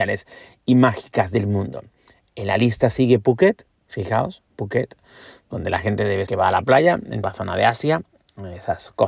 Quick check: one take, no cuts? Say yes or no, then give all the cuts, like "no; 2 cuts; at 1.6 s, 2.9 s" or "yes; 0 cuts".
no; 2 cuts; at 6.3 s, 7.2 s